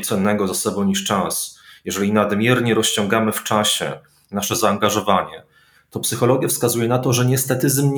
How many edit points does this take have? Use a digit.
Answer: 0